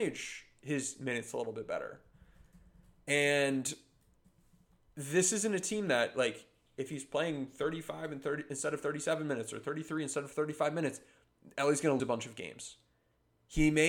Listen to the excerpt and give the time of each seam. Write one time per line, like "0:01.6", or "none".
0:12.0